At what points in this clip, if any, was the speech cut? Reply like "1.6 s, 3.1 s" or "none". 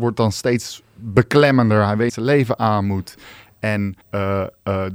2.1 s, 4.0 s